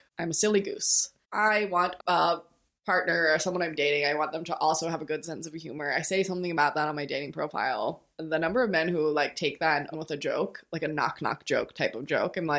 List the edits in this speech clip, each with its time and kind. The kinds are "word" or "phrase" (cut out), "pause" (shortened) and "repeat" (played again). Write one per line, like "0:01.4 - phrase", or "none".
0:02.0 - word
0:08.1 - pause
0:09.9 - word